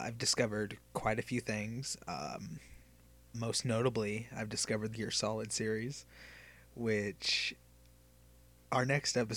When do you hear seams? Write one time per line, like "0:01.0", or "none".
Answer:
0:03.3
0:04.9